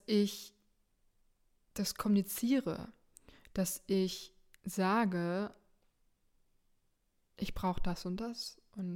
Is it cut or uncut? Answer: uncut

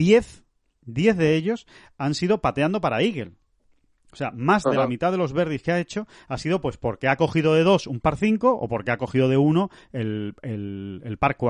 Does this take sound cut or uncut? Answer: uncut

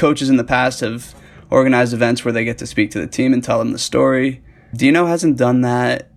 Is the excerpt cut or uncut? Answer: uncut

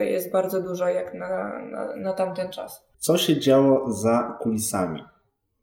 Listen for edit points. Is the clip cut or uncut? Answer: cut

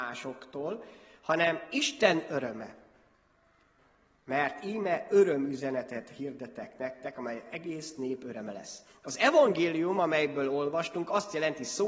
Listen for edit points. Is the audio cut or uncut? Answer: uncut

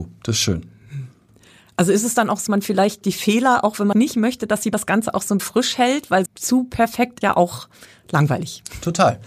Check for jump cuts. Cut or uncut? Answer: cut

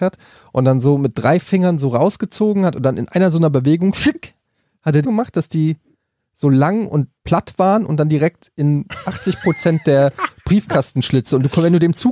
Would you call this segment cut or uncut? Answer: cut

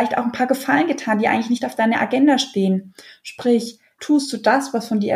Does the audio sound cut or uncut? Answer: cut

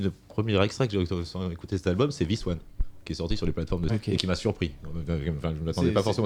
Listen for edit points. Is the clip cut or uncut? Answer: cut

